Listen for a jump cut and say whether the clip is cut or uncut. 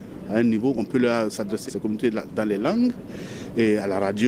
cut